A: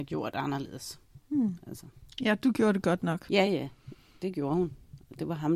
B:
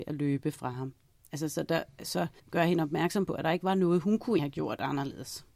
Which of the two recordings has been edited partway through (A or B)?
B